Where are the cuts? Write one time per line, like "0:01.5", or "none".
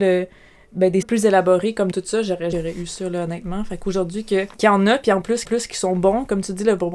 0:01.0
0:01.9
0:02.5
0:04.5
0:05.4

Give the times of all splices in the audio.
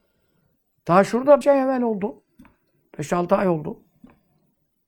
0:01.4

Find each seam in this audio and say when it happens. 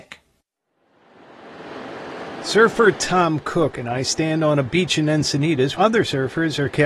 0:05.7

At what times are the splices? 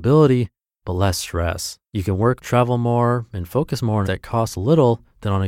0:01.8
0:02.4
0:04.0

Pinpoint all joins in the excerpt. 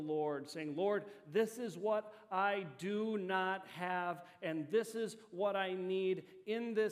none

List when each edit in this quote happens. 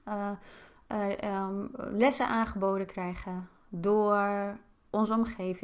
none

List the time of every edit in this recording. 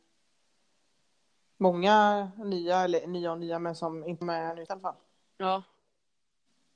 0:04.2
0:04.7

